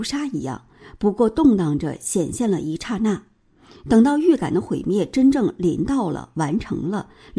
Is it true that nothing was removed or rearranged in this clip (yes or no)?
yes